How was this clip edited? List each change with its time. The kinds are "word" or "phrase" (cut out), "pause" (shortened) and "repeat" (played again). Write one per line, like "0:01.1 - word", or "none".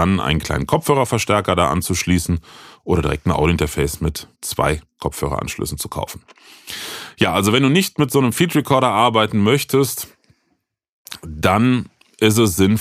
0:04.3 - pause